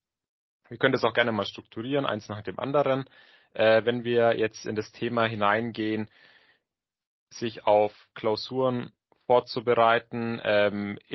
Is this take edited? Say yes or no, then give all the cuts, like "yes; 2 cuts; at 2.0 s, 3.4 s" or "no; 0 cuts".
no; 0 cuts